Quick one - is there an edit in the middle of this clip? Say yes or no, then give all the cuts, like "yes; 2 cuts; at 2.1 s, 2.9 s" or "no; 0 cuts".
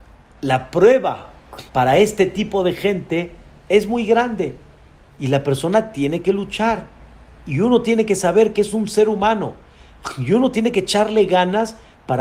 yes; 1 cut; at 1.7 s